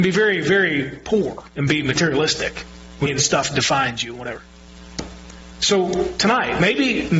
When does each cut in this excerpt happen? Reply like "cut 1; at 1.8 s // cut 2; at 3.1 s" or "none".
cut 1; at 1.5 s // cut 2; at 3.1 s